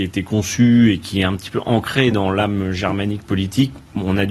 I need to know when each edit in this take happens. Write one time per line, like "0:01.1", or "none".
none